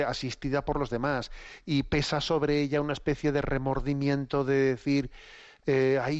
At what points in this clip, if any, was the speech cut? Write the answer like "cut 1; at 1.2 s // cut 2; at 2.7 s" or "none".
none